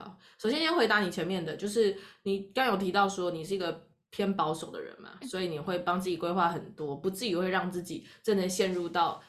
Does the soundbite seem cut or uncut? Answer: cut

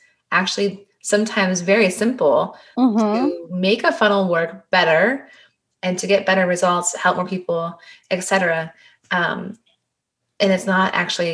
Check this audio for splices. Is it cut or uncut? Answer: uncut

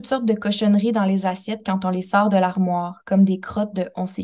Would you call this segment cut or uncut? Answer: uncut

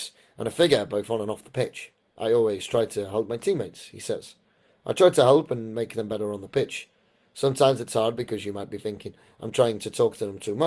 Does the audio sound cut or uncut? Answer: cut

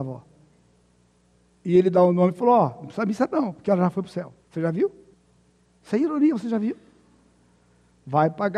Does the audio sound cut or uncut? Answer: cut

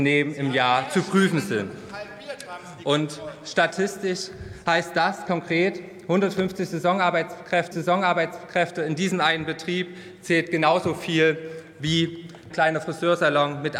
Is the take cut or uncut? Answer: cut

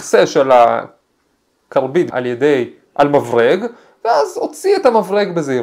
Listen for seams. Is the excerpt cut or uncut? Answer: cut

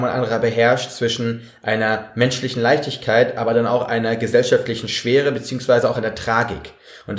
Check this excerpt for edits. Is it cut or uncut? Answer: uncut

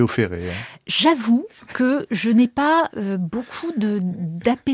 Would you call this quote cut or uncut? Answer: uncut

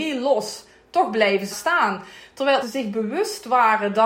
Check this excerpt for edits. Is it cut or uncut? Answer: cut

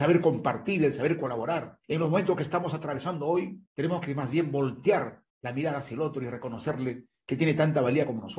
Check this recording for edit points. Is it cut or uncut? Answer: cut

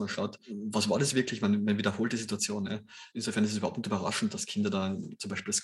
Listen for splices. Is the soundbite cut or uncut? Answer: uncut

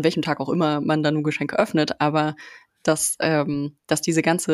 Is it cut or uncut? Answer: uncut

